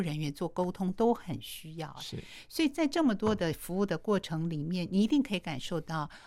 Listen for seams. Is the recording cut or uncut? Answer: uncut